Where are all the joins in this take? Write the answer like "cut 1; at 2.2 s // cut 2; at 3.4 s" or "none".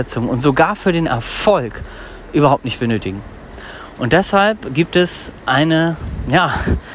none